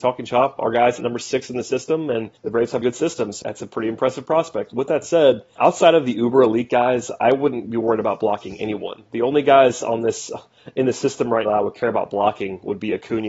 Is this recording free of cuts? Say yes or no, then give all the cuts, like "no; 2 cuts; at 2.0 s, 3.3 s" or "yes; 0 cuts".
no; 6 cuts; at 1.0 s, 2.4 s, 2.8 s, 3.4 s, 5.6 s, 11.5 s